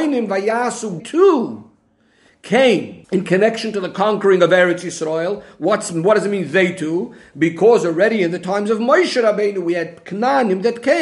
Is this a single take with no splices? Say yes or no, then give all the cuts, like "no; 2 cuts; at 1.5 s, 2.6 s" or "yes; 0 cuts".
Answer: no; 2 cuts; at 1.0 s, 3.0 s